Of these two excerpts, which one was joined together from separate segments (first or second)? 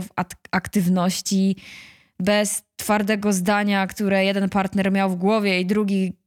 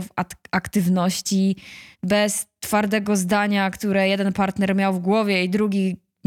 second